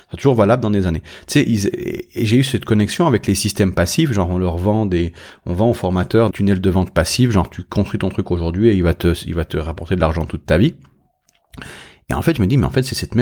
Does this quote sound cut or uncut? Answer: cut